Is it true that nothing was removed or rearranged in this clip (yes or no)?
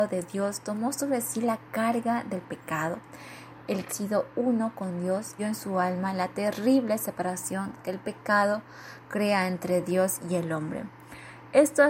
no